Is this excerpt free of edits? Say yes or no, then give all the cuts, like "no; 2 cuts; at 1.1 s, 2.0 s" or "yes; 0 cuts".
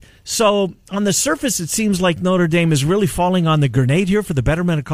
yes; 0 cuts